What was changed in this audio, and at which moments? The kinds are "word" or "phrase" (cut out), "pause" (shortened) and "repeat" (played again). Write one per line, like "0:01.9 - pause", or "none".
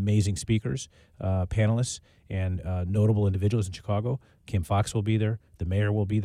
none